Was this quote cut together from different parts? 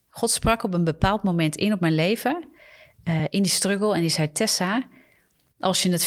no; 0 cuts

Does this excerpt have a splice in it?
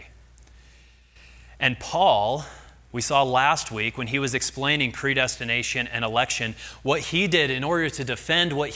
no; 0 cuts

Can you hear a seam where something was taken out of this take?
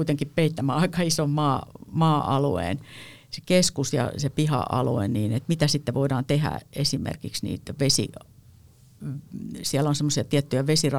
no; 0 cuts

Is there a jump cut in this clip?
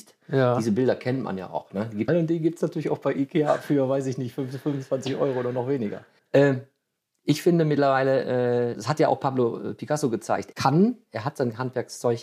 yes; 4 cuts; at 2.1 s, 6.2 s, 8.7 s, 10.5 s

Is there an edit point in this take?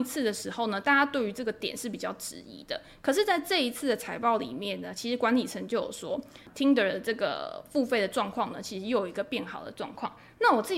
no; 0 cuts

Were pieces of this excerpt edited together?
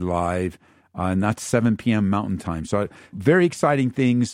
yes; 1 cut; at 3.1 s

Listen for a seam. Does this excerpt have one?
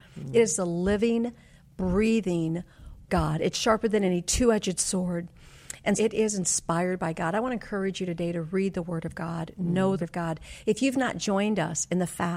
yes; 3 cuts; at 3.1 s, 6.0 s, 10.0 s

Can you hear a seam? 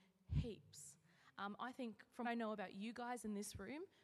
yes; 1 cut; at 2.2 s

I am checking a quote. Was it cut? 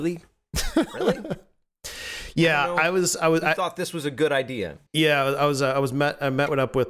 yes; 1 cut; at 4.9 s

